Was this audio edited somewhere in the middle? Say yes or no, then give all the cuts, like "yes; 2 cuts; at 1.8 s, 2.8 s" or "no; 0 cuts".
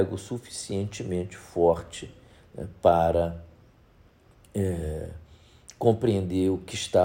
no; 0 cuts